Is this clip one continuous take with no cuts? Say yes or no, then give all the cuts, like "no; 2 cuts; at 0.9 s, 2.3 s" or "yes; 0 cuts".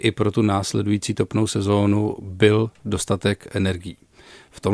yes; 0 cuts